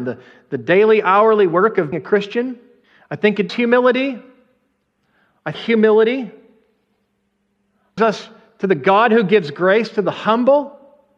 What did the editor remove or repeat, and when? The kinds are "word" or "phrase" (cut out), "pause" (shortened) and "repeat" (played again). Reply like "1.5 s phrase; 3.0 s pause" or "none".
1.9 s word; 2.8 s pause; 3.5 s word; 5.5 s phrase; 8.0 s phrase